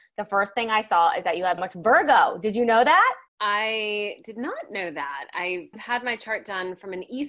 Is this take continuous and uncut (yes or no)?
no